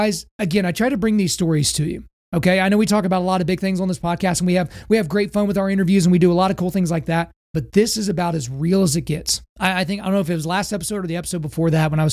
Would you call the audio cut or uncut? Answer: cut